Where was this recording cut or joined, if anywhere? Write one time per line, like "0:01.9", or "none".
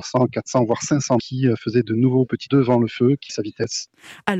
0:01.2
0:02.5
0:03.3